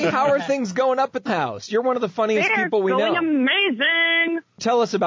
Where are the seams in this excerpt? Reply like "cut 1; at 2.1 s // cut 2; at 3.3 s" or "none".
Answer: cut 1; at 1.3 s

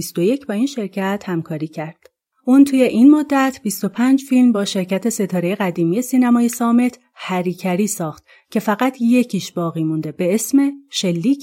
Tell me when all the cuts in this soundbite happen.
none

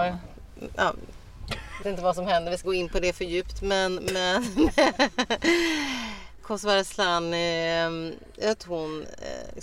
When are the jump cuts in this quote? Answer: cut 1; at 1.8 s // cut 2; at 2.6 s // cut 3; at 6.4 s // cut 4; at 8.6 s

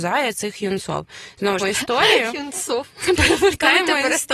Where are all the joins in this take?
cut 1; at 1.6 s

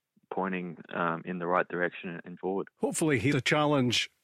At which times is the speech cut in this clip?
cut 1; at 2.4 s // cut 2; at 2.7 s // cut 3; at 3.3 s

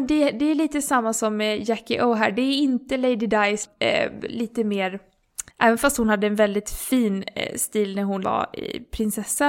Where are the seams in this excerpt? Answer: cut 1; at 5.5 s

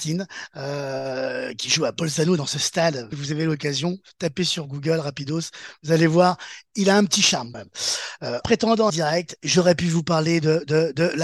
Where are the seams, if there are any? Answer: cut 1; at 3.1 s // cut 2; at 7.5 s // cut 3; at 8.4 s // cut 4; at 8.9 s

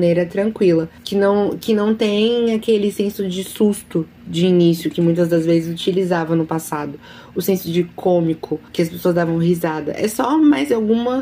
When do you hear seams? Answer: cut 1; at 1.0 s // cut 2; at 8.7 s

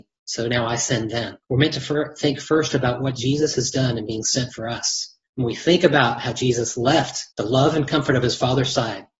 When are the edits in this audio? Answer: cut 1; at 1.4 s // cut 2; at 5.2 s // cut 3; at 7.3 s

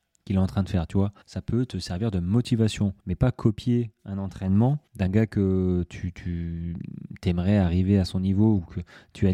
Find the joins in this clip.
cut 1; at 1.2 s // cut 2; at 3.0 s // cut 3; at 4.9 s

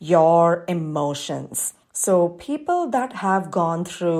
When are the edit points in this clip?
cut 1; at 1.8 s

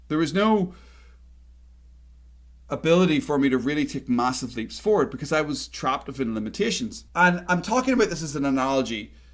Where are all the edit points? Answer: cut 1; at 7.1 s

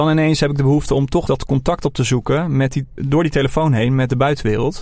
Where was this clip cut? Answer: cut 1; at 1.3 s // cut 2; at 3.0 s

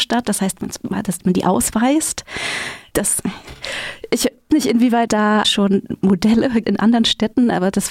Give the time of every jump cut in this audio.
cut 1; at 4.5 s // cut 2; at 5.1 s // cut 3; at 5.4 s // cut 4; at 6.6 s

